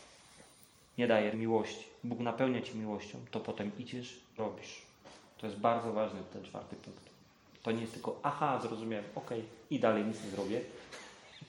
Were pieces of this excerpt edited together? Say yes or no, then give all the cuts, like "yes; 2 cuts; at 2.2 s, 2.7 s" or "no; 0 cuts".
yes; 2 cuts; at 1.3 s, 4.4 s